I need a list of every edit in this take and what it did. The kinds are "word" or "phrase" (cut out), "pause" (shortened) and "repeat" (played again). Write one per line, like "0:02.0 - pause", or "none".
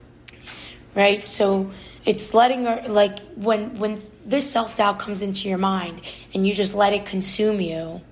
0:02.0 - pause

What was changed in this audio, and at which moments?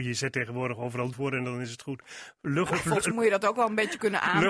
0:01.1 - word
0:02.7 - word
0:03.1 - word

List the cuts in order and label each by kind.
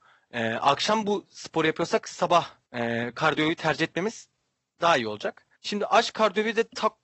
0:02.7 - pause
0:05.6 - pause

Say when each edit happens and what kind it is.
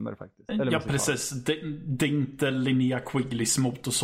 none

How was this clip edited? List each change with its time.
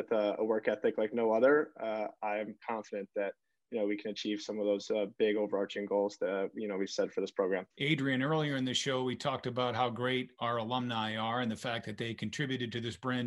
0:07.7 - pause

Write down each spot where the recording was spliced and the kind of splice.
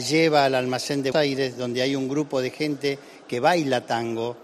0:01.1 - word

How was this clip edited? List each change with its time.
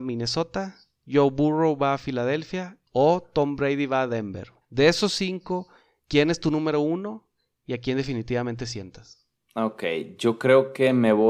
0:04.6 - pause

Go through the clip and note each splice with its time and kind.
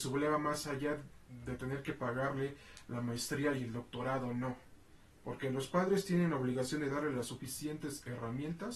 none

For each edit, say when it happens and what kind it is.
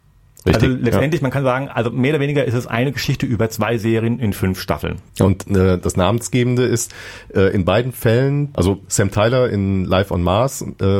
0:05.1 - pause

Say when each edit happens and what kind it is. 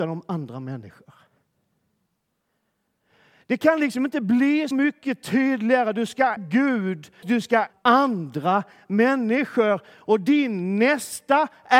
0:04.7 - word
0:06.4 - word
0:07.2 - word
0:07.7 - word

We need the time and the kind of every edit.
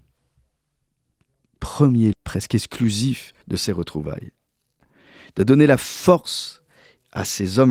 0:02.1 - word
0:03.4 - pause

